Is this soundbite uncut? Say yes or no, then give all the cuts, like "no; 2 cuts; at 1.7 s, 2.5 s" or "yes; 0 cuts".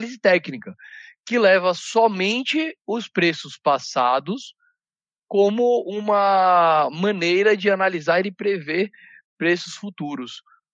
yes; 0 cuts